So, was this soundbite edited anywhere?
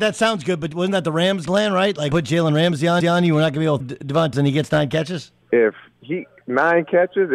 yes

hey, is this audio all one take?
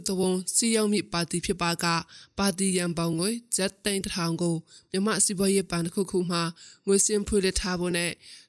yes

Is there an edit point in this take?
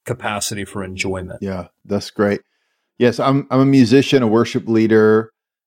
no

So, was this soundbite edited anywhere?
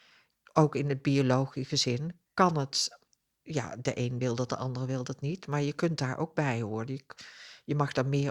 yes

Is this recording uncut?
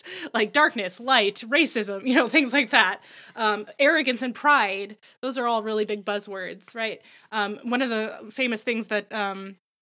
yes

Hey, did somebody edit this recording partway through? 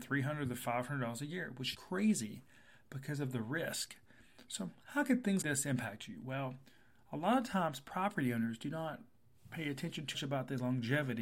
yes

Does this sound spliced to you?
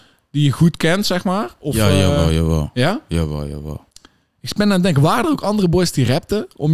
yes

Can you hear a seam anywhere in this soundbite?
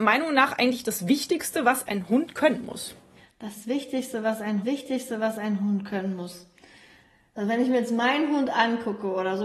yes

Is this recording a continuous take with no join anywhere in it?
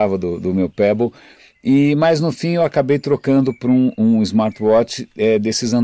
yes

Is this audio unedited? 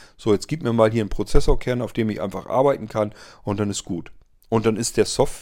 yes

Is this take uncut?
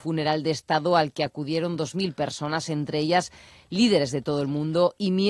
yes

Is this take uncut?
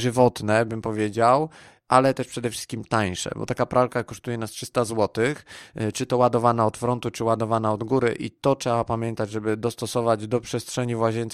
yes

